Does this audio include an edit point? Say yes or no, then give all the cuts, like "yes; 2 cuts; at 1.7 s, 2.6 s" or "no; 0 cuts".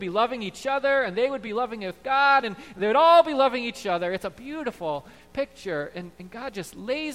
no; 0 cuts